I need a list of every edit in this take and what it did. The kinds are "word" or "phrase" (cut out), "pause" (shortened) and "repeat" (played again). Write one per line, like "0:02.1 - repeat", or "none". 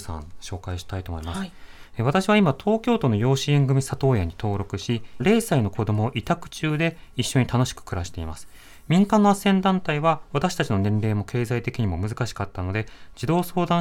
0:05.2 - word